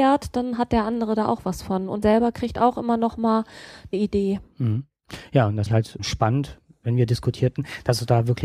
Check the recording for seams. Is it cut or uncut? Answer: cut